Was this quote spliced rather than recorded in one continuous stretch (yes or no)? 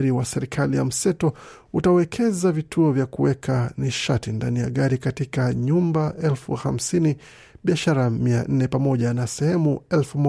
no